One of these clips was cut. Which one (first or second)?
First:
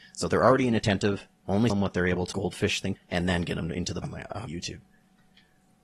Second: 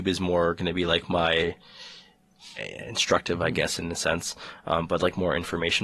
first